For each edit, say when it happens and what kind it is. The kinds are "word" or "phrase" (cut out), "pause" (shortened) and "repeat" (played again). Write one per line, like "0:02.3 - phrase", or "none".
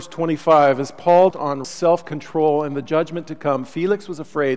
0:01.3 - word
0:01.6 - word